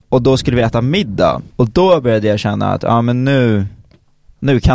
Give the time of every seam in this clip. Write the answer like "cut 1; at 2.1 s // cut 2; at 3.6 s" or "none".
cut 1; at 1.5 s